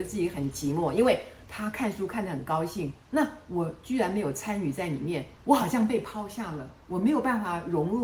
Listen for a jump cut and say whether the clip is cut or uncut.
cut